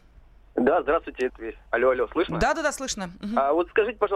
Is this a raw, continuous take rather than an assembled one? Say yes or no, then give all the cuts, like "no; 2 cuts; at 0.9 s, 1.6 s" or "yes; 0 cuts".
no; 2 cuts; at 1.3 s, 1.7 s